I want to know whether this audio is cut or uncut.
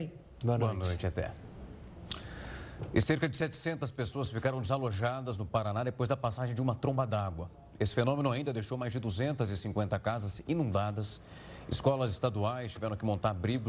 uncut